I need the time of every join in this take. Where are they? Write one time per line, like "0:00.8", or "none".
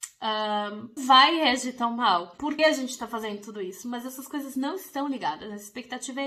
0:01.0
0:02.6